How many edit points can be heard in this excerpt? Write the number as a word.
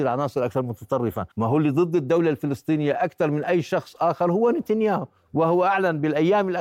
one